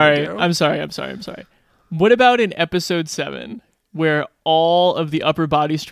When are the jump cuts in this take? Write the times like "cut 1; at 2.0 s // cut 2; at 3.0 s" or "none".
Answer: none